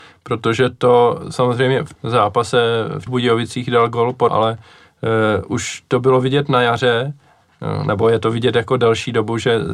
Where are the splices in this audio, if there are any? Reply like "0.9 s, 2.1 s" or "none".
1.9 s, 3.1 s, 4.3 s